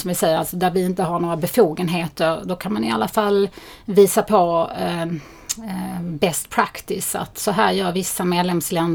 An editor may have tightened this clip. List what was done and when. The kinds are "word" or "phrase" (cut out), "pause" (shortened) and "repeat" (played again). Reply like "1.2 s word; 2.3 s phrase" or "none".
none